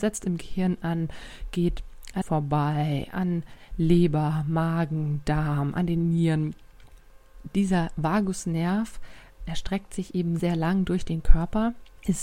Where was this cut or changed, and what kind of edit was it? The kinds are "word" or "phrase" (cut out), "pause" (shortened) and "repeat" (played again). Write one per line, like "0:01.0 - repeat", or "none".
0:02.2 - word
0:10.4 - word

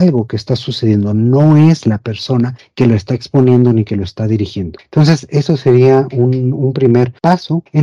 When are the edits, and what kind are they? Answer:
none

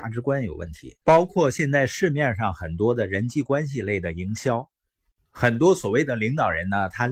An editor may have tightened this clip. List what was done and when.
0:01.0 - pause

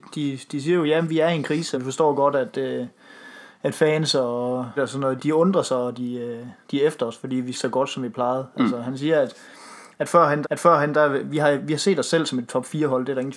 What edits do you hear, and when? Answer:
0:01.7 - word
0:04.8 - word
0:05.2 - word
0:06.6 - pause
0:07.5 - phrase
0:10.4 - repeat

